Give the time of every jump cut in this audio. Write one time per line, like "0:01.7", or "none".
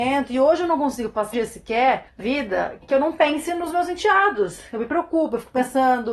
0:01.3
0:02.2
0:02.8